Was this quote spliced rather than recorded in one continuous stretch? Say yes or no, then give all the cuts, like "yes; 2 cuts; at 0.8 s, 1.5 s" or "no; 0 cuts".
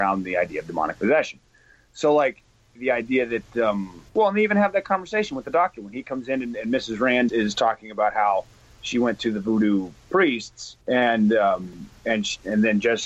yes; 4 cuts; at 2.8 s, 4.1 s, 7.3 s, 10.8 s